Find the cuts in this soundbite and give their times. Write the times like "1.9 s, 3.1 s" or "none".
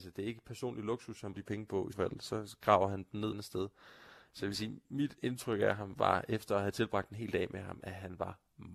1.3 s, 1.9 s, 3.3 s